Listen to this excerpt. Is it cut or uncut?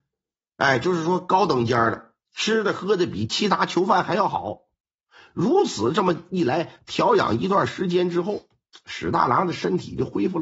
uncut